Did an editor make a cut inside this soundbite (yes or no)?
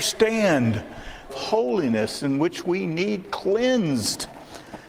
yes